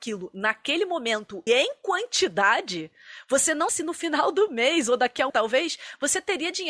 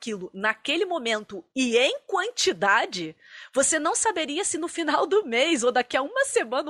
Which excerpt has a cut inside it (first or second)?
first